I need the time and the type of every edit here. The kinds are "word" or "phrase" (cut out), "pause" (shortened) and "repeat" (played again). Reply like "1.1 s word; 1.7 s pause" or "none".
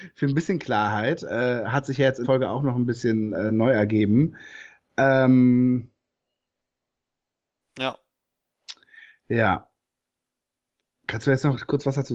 2.2 s word